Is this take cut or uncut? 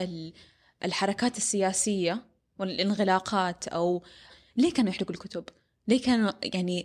uncut